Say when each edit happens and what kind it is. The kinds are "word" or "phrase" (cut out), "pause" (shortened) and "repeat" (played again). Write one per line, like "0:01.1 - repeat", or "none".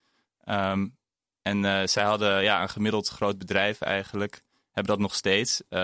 none